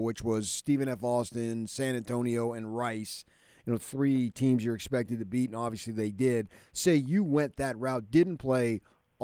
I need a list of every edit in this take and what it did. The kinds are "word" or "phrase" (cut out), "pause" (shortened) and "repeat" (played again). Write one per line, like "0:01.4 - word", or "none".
none